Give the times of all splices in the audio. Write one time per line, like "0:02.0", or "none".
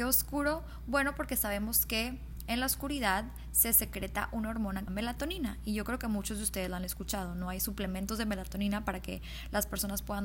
0:04.9